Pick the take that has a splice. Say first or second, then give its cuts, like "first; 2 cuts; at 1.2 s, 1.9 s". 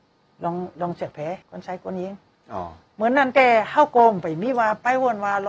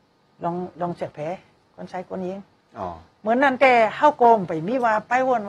first; 1 cut; at 1.4 s